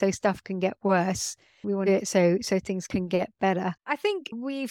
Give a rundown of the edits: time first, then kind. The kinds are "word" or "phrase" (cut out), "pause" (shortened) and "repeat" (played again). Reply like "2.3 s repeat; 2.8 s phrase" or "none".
1.9 s phrase; 3.8 s pause